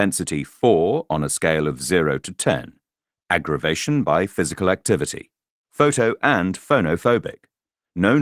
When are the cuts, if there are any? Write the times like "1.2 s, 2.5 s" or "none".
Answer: none